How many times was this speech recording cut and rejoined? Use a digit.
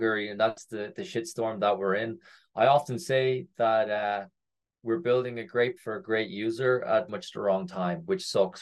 2